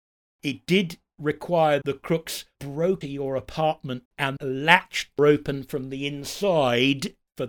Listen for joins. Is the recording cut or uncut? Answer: cut